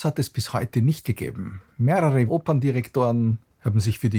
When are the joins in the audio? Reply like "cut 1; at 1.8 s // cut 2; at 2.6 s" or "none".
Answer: cut 1; at 1.0 s // cut 2; at 2.3 s